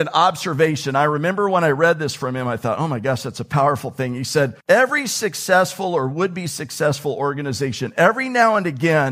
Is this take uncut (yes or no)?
no